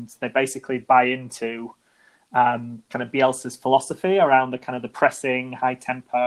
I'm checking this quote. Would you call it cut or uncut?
uncut